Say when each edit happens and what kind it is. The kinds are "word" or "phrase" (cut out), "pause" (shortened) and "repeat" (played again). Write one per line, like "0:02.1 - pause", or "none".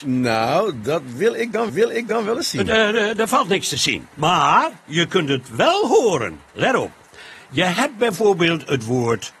0:01.7 - repeat
0:04.1 - pause
0:06.5 - pause